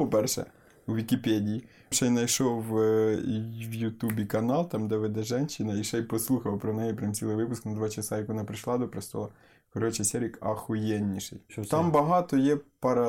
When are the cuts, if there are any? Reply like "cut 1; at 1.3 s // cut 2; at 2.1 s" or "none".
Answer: cut 1; at 1.9 s

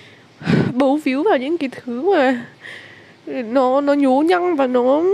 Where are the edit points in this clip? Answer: none

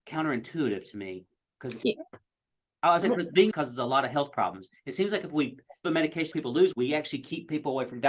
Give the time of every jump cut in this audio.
cut 1; at 1.8 s // cut 2; at 3.0 s // cut 3; at 3.5 s // cut 4; at 5.8 s // cut 5; at 6.3 s // cut 6; at 6.7 s

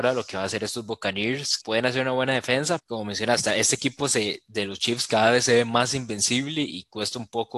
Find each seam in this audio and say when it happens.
cut 1; at 1.6 s // cut 2; at 2.8 s

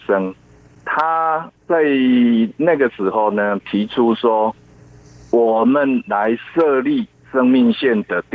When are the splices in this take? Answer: cut 1; at 1.6 s

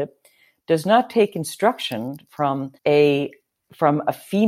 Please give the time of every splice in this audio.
cut 1; at 2.8 s

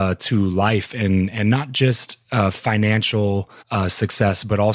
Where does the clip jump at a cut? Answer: cut 1; at 3.6 s

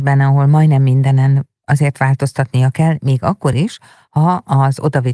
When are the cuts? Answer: none

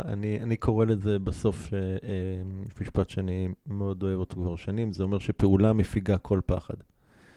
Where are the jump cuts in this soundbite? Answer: none

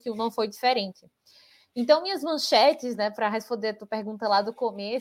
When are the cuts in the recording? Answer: none

